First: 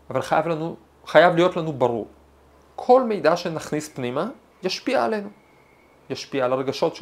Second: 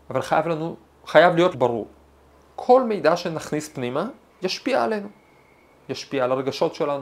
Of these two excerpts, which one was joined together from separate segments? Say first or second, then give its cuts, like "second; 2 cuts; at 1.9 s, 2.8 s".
second; 1 cut; at 1.5 s